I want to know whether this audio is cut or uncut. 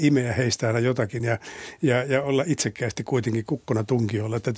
uncut